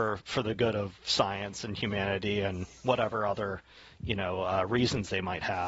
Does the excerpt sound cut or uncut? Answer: uncut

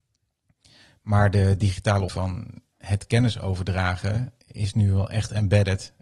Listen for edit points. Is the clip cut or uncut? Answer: cut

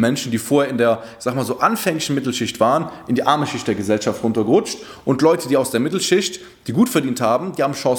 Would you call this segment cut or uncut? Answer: uncut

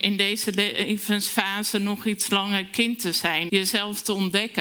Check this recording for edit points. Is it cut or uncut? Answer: cut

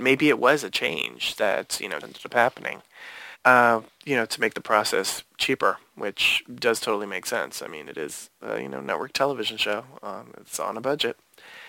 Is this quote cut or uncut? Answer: cut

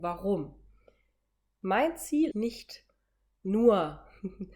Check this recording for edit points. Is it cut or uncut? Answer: cut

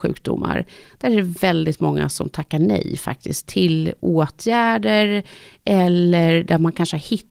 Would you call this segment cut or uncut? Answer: uncut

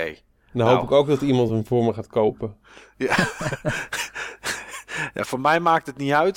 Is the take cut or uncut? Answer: uncut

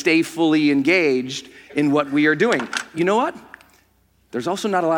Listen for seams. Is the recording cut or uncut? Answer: uncut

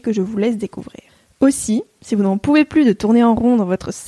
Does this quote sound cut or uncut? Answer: uncut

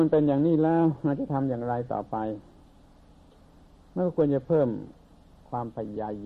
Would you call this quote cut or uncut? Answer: uncut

